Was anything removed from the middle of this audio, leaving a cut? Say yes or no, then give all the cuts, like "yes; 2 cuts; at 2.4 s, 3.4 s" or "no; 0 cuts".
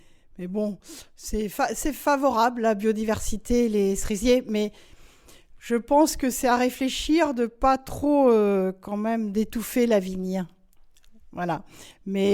no; 0 cuts